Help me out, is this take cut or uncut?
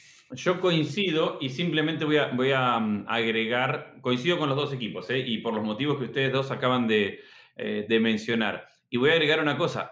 uncut